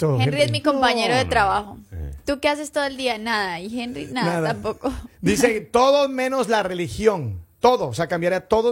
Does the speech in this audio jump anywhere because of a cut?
no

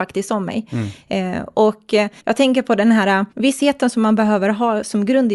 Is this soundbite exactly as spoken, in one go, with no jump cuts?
no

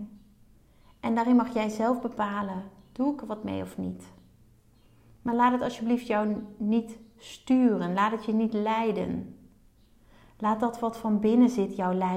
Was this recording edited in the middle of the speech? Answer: no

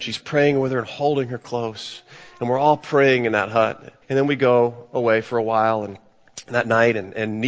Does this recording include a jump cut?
yes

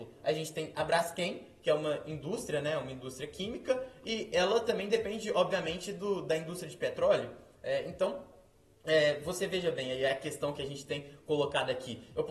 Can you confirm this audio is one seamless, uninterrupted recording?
yes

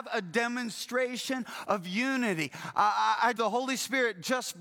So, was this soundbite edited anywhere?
yes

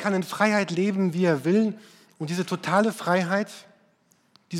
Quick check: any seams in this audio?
no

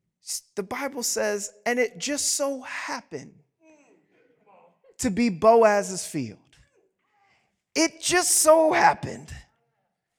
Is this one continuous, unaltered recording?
yes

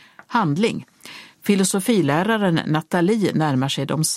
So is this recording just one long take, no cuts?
yes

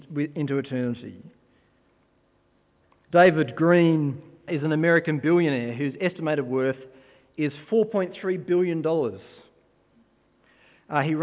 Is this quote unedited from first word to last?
no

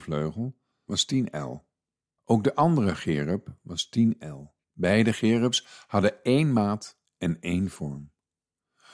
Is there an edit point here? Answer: yes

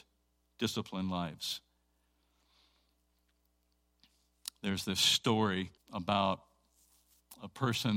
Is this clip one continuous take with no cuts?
no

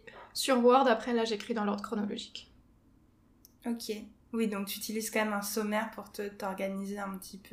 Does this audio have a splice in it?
no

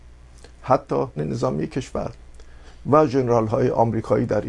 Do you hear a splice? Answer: yes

